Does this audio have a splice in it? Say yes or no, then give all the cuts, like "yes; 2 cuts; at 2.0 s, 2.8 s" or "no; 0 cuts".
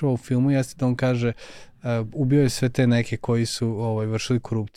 no; 0 cuts